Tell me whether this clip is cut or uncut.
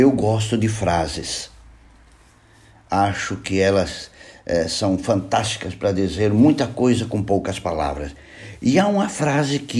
uncut